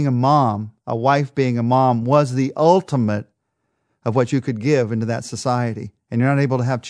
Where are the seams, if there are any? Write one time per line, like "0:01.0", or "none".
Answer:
none